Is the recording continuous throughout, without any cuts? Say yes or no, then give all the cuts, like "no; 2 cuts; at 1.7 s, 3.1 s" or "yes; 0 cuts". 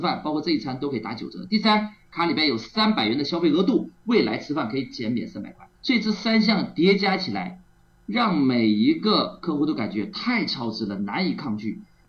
no; 1 cut; at 5.8 s